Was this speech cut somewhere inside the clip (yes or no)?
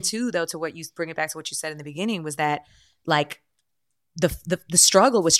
no